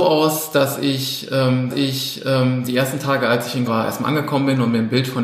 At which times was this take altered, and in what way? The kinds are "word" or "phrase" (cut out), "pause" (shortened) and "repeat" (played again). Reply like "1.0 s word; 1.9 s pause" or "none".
1.7 s repeat; 3.7 s word